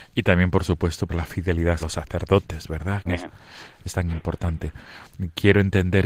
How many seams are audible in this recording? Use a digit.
3